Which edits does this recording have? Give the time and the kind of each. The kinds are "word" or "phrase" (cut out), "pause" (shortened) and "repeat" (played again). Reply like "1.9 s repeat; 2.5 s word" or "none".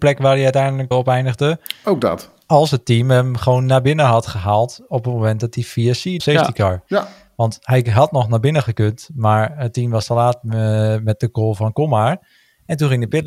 0.9 s word; 6.2 s phrase

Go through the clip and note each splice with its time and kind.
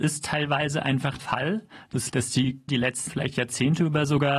1.2 s word; 2.1 s phrase; 2.7 s word; 3.1 s word

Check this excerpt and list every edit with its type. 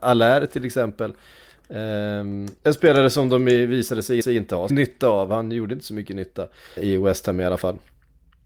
2.6 s pause; 4.2 s repeat; 4.7 s phrase; 6.8 s word

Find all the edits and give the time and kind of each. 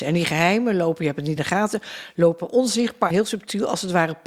1.4 s word; 3.1 s word

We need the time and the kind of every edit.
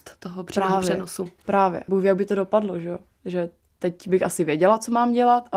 1.9 s word

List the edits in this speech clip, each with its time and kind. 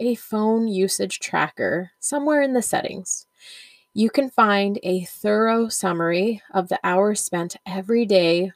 none

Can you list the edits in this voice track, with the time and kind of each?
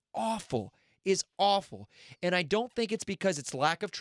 none

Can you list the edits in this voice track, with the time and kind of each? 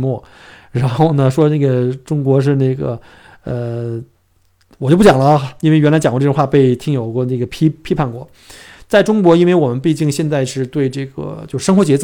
none

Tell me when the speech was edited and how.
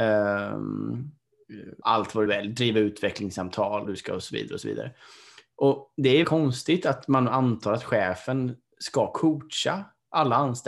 1.8 s word; 2.3 s word; 3.8 s word; 6.2 s word

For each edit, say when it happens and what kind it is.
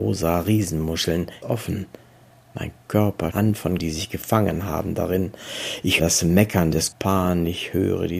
1.4 s word; 3.3 s word; 3.8 s word; 6.0 s word; 6.9 s word

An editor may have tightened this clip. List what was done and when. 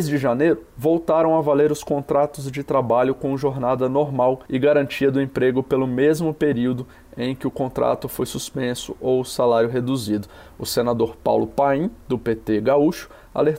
4.5 s pause

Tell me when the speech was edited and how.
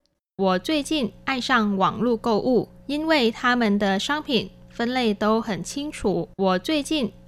2.8 s pause; 6.3 s pause

